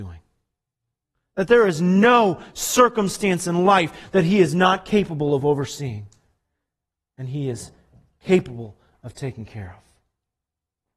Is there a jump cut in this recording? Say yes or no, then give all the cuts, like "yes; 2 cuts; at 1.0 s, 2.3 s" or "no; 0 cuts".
no; 0 cuts